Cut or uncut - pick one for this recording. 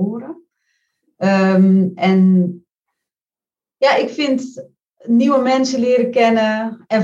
uncut